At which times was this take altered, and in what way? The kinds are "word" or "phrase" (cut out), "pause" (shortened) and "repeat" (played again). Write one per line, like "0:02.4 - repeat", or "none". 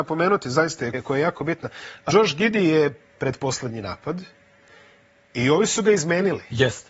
0:00.9 - word
0:02.1 - word
0:03.1 - word